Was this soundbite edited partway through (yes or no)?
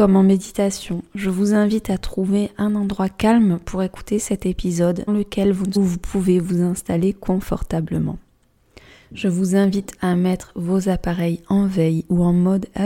yes